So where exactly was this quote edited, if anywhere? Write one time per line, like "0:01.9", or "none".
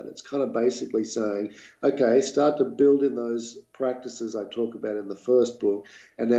none